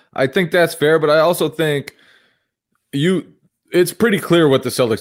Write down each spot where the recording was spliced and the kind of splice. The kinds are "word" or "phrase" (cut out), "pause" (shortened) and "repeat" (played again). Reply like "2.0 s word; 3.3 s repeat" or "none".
none